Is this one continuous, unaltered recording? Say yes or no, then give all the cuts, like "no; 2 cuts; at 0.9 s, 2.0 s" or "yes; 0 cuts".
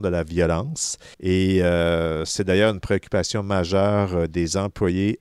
no; 1 cut; at 1.1 s